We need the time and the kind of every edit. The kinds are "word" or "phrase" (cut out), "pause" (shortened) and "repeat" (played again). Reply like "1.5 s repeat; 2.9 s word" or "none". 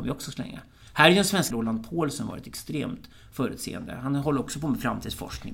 1.5 s word